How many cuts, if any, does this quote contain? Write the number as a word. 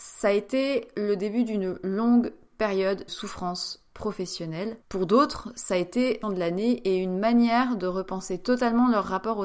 three